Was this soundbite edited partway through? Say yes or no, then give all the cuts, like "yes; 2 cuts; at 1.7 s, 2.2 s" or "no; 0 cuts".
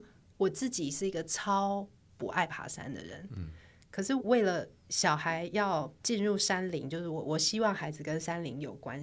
no; 0 cuts